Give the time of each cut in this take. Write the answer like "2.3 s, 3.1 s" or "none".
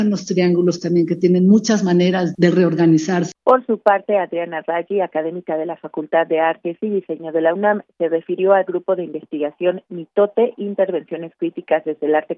2.3 s, 3.3 s